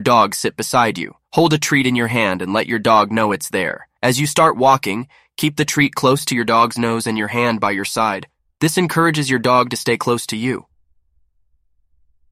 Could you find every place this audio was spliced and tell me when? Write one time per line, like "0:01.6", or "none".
0:01.2
0:04.0